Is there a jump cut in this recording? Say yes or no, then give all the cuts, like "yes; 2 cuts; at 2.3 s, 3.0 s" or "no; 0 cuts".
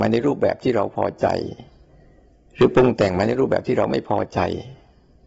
no; 0 cuts